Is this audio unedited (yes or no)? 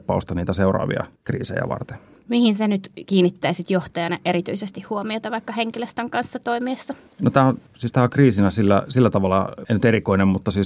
yes